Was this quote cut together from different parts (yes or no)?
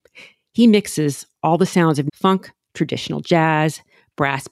yes